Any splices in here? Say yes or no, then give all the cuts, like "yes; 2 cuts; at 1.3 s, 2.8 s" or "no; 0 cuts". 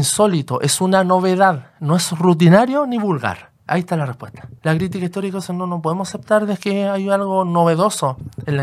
yes; 2 cuts; at 3.6 s, 4.6 s